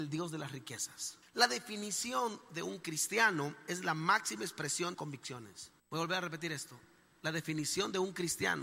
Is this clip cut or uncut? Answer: cut